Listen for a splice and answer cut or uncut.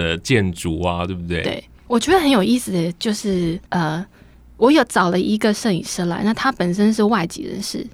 cut